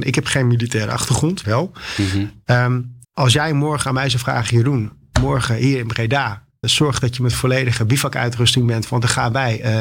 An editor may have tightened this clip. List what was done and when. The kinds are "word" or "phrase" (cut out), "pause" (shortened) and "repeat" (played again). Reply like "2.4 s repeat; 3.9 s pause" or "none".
1.4 s word; 3.0 s pause; 6.6 s word